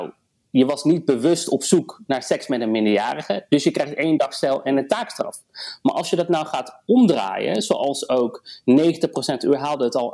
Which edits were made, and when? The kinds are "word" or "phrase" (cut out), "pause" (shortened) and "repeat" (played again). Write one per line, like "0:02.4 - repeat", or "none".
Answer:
none